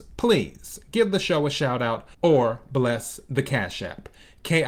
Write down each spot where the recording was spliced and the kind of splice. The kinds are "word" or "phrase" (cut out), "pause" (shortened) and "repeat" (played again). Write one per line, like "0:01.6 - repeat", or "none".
0:02.1 - pause